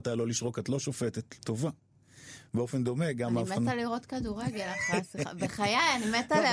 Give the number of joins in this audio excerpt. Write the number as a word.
one